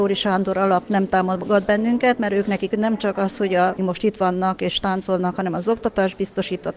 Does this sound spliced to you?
yes; 2 cuts; at 2.7 s, 3.8 s

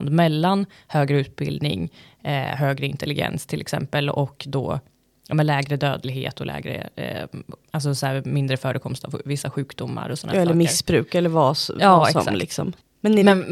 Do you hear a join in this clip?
no; 0 cuts

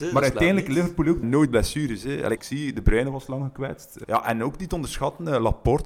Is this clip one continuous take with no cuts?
no; 3 cuts; at 1.2 s, 2.4 s, 4.0 s

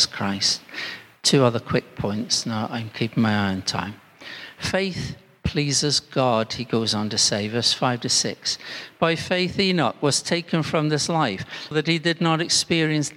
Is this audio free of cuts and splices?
no; 1 cut; at 11.7 s

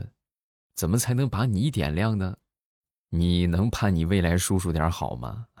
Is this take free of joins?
yes; 0 cuts

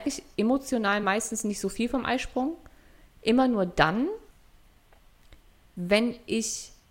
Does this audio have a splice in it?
no; 0 cuts

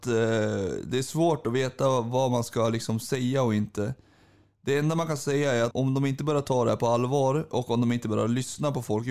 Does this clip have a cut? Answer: yes; 1 cut; at 5.7 s

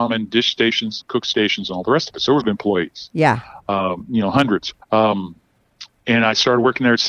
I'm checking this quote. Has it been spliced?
yes; 3 cuts; at 1.0 s, 2.4 s, 4.8 s

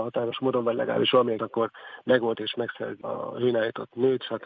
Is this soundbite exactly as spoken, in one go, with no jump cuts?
no; 3 cuts; at 1.4 s, 2.3 s, 3.0 s

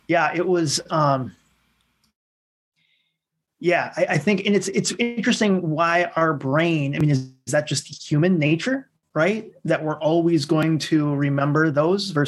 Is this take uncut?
yes; 0 cuts

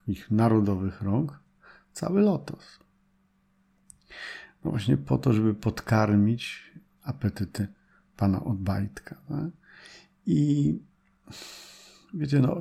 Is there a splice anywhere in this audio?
no; 0 cuts

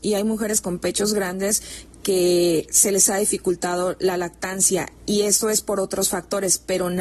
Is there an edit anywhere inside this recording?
yes; 1 cut; at 5.0 s

